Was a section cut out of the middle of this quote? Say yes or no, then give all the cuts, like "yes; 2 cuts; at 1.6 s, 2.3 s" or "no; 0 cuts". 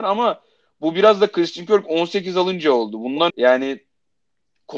yes; 1 cut; at 3.3 s